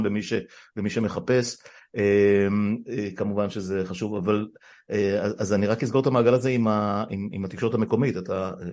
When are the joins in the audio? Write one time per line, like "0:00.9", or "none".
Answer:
none